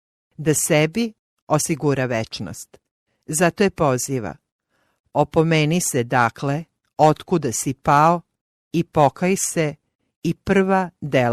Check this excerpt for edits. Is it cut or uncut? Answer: uncut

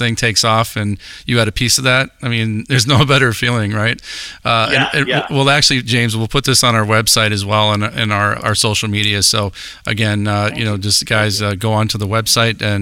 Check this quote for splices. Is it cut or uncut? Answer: cut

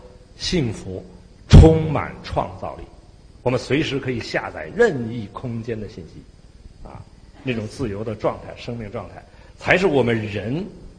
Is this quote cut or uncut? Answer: uncut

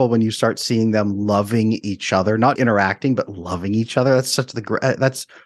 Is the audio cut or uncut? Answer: cut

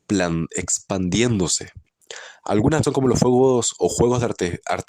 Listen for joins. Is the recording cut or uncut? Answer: cut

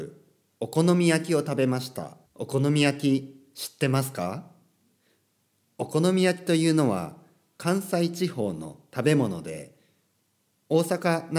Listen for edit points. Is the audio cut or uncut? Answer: cut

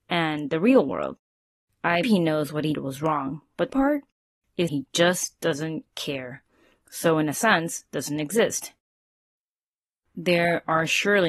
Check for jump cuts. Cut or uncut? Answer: cut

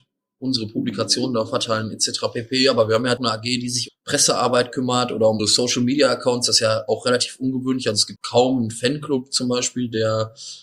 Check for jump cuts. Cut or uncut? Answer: cut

